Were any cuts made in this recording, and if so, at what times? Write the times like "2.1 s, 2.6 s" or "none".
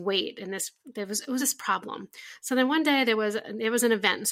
1.4 s